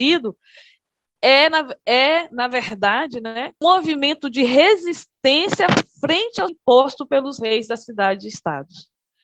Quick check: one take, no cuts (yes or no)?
no